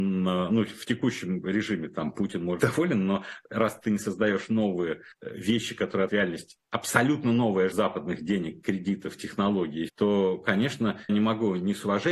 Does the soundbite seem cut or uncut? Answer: cut